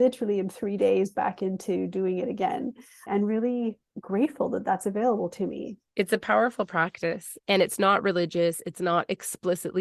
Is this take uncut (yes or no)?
no